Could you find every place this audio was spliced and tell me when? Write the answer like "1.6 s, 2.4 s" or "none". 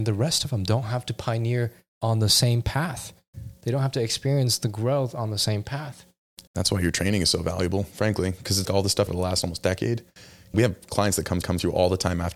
1.9 s, 6.5 s, 8.6 s, 9.1 s, 10.5 s, 11.4 s